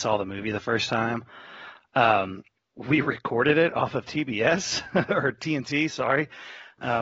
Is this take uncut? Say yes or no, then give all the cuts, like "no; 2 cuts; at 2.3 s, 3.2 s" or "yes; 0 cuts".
yes; 0 cuts